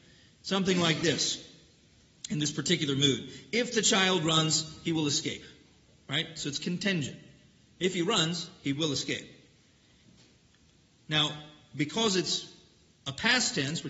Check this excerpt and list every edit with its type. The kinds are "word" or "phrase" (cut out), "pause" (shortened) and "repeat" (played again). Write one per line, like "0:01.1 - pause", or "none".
none